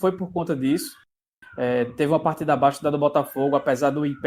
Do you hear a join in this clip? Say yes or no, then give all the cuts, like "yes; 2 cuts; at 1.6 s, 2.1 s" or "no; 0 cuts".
no; 0 cuts